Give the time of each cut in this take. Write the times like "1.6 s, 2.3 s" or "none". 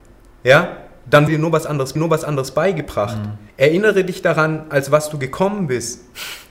1.3 s, 2.0 s, 3.5 s